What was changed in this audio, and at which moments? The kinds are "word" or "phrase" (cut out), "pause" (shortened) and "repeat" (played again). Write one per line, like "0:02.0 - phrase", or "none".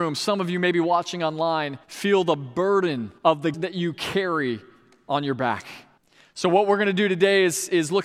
0:01.8 - pause
0:03.2 - pause
0:03.5 - word
0:06.0 - pause